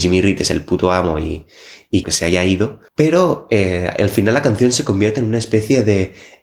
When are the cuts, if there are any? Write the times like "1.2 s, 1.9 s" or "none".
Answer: 2.0 s, 2.9 s